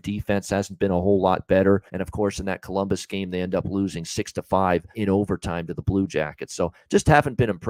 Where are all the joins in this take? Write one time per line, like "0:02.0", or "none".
0:01.9
0:04.9

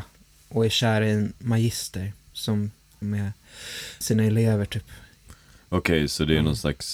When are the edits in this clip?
0:03.0
0:04.0

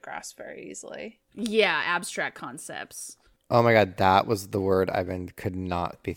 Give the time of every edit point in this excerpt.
none

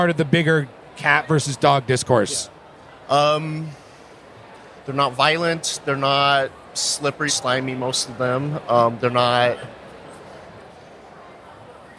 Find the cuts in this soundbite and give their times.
0:07.3

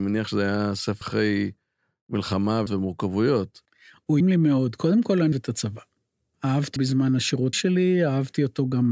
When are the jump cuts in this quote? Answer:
0:01.0
0:02.7
0:04.2
0:05.3
0:06.8
0:07.5

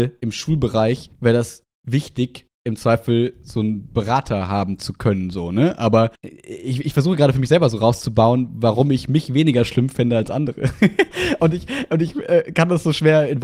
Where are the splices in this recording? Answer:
0:01.1
0:06.1

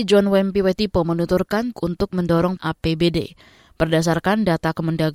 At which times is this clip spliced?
0:01.7
0:02.6

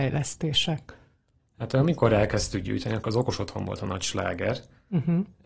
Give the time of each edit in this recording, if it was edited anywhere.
none

